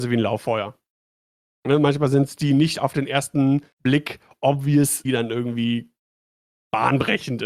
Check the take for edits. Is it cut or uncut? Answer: cut